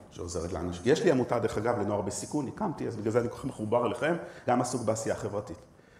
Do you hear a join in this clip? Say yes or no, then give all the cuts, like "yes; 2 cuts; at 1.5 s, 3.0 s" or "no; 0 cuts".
yes; 1 cut; at 4.5 s